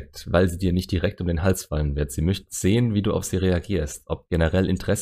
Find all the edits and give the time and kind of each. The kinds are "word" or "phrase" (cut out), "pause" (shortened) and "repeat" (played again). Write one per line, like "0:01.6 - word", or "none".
none